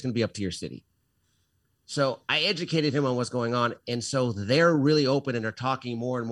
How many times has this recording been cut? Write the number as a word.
zero